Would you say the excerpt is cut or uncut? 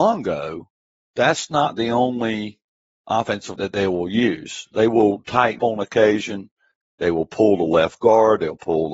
cut